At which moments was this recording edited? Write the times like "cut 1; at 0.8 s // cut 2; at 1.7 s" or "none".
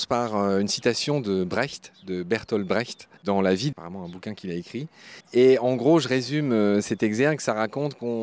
cut 1; at 3.2 s // cut 2; at 3.7 s // cut 3; at 5.2 s